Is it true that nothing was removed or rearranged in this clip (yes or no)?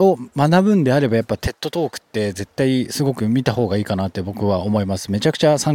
yes